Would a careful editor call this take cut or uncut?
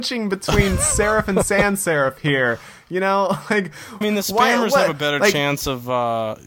cut